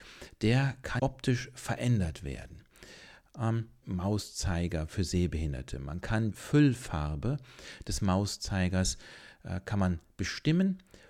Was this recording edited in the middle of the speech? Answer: yes; 3 cuts; at 1.0 s, 3.8 s, 6.3 s

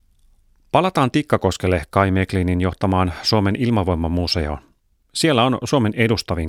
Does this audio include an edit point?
no; 0 cuts

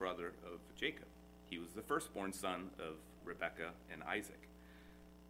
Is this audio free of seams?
no; 1 cut; at 3.2 s

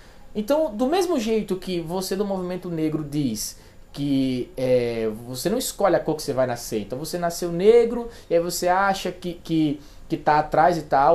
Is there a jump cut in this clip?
no; 0 cuts

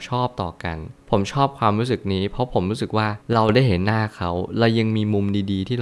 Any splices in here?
yes; 1 cut; at 3.2 s

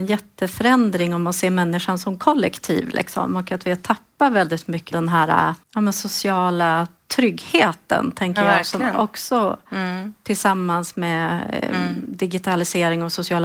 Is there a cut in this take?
yes; 2 cuts; at 4.9 s, 5.6 s

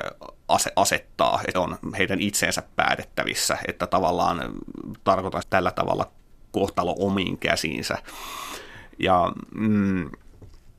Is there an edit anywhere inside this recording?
yes; 3 cuts; at 1.5 s, 5.4 s, 6.4 s

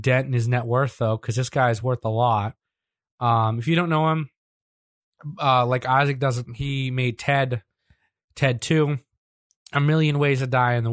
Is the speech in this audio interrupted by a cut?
no; 0 cuts

